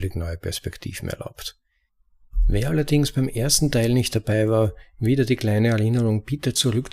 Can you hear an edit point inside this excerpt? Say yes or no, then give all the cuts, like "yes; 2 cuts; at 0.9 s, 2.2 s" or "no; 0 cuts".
no; 0 cuts